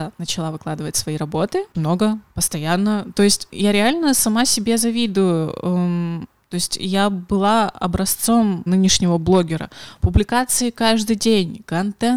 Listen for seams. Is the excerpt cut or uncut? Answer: cut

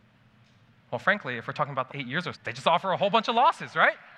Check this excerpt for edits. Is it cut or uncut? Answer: cut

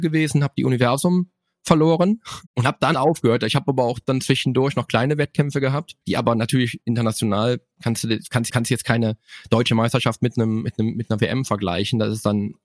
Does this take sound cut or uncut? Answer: cut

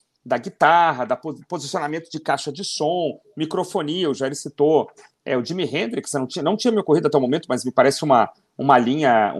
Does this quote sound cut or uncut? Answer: uncut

